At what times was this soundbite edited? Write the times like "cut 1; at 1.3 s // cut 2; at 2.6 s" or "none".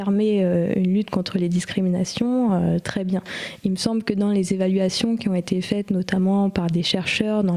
none